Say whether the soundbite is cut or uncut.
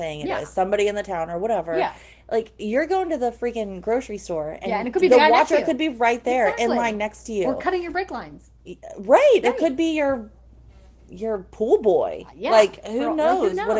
cut